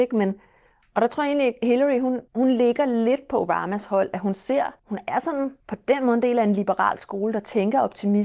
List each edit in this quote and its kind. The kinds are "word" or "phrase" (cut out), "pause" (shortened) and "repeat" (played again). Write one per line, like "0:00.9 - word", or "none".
0:02.3 - pause
0:04.8 - pause
0:05.6 - pause